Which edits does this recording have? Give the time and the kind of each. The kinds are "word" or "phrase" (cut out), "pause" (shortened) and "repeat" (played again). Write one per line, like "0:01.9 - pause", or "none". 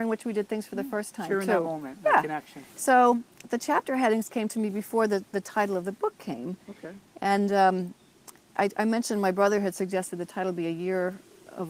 0:02.7 - pause